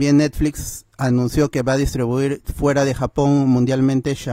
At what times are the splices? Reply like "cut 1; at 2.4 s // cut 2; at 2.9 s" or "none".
none